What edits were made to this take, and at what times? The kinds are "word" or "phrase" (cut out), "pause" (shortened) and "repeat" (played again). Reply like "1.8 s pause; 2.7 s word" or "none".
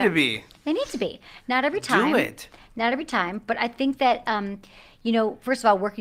none